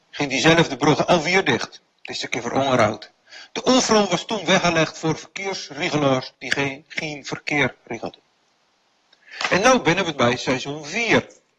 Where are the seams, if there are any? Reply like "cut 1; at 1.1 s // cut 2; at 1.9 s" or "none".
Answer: cut 1; at 1.9 s // cut 2; at 6.3 s // cut 3; at 10.1 s